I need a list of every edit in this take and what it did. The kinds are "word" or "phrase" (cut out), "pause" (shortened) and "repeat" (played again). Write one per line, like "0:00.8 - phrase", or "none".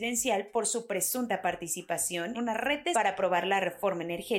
0:02.3 - word
0:02.9 - word